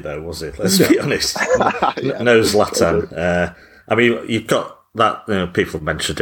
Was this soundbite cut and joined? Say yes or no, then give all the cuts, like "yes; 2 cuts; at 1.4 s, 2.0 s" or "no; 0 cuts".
no; 0 cuts